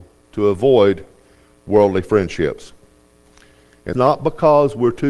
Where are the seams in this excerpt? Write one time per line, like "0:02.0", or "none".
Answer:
0:03.9